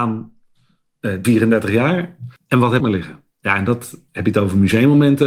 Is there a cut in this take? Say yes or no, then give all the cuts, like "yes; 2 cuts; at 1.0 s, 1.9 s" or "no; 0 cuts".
yes; 5 cuts; at 1.2 s, 2.4 s, 2.8 s, 3.3 s, 4.1 s